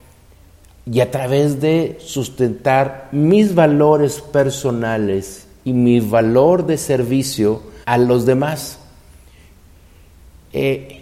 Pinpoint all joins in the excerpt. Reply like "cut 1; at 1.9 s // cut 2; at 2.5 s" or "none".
cut 1; at 7.8 s